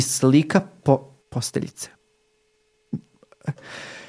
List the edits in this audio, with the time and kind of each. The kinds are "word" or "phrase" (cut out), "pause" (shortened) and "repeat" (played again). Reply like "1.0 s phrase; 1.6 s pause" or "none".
1.2 s pause